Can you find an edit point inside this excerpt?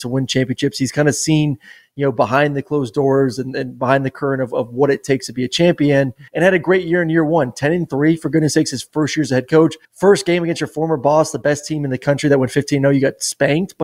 yes; 2 cuts; at 6.3 s, 9.8 s

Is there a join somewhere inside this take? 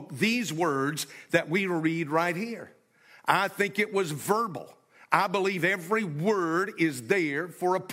no; 0 cuts

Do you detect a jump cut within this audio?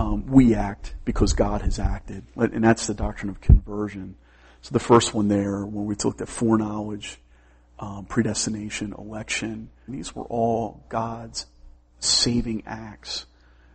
yes; 1 cut; at 9.9 s

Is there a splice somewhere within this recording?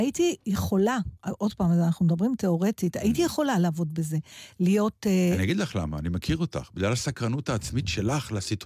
no; 0 cuts

